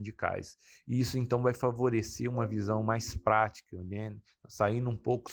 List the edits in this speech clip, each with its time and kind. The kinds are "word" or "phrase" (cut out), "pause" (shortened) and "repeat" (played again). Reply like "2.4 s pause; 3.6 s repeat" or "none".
none